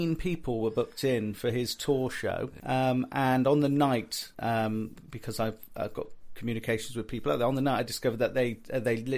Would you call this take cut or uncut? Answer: uncut